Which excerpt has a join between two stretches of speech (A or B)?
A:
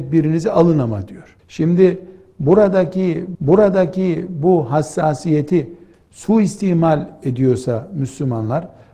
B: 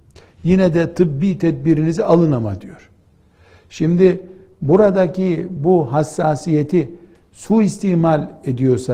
A